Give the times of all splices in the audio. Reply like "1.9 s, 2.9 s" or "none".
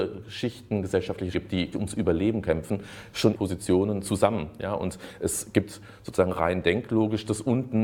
1.3 s, 1.7 s, 3.3 s